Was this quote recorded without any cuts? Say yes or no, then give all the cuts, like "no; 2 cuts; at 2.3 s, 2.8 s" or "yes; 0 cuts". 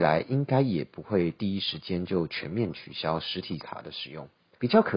no; 1 cut; at 3.6 s